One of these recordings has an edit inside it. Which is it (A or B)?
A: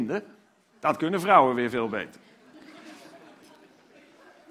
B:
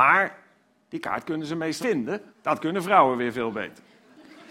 B